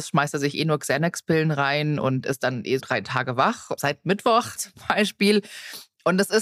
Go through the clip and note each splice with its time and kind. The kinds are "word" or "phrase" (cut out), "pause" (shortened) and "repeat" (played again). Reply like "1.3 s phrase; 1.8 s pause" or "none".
2.8 s word; 3.8 s word; 4.6 s word